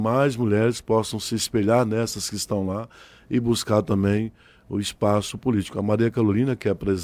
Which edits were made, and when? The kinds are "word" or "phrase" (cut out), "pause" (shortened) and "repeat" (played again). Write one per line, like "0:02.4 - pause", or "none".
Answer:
none